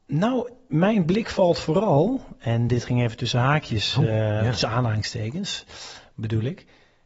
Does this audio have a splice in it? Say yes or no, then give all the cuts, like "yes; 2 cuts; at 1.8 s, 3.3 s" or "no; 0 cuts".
no; 0 cuts